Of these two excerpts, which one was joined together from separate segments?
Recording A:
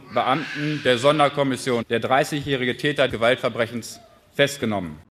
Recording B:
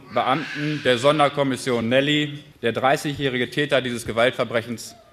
A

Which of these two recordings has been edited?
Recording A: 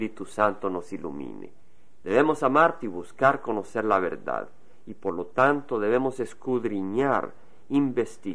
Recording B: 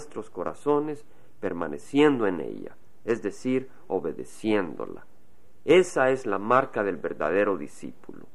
A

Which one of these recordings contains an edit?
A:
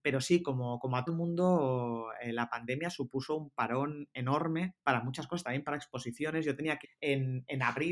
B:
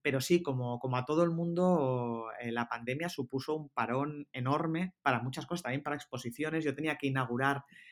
A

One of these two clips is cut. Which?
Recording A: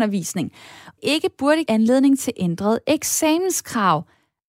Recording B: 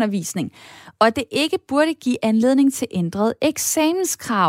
A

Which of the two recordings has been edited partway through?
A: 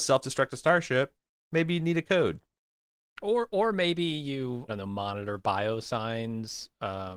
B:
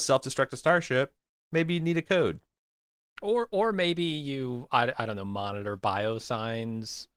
A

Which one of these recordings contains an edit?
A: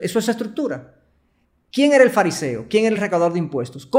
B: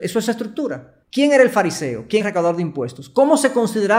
B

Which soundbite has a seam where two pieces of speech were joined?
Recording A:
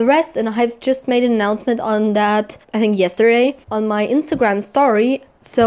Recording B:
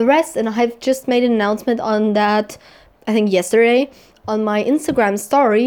A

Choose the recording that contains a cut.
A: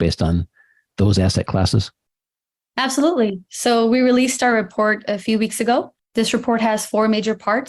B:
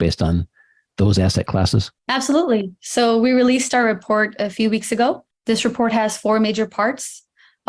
B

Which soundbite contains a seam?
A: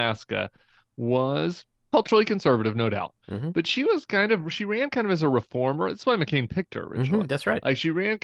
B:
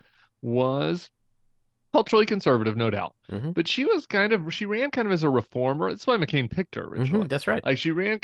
A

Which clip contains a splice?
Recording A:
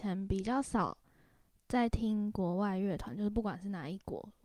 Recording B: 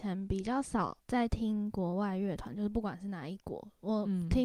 B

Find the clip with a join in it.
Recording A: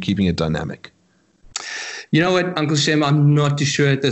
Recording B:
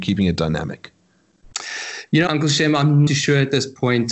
B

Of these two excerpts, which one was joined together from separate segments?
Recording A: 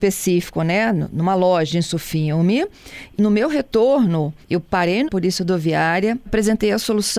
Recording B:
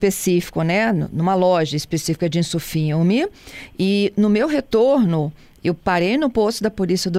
A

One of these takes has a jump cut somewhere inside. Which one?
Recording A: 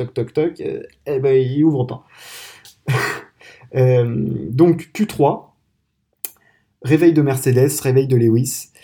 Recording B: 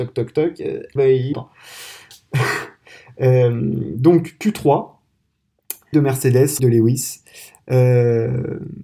B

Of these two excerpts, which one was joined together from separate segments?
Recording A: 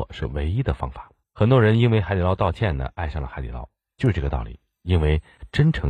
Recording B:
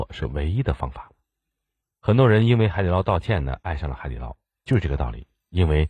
A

